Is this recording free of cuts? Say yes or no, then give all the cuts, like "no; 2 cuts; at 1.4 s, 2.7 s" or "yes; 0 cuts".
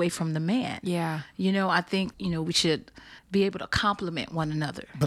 no; 2 cuts; at 2.1 s, 3.2 s